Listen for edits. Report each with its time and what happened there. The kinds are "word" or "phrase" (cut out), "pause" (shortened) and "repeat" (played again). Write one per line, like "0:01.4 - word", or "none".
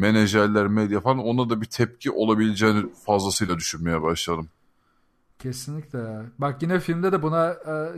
none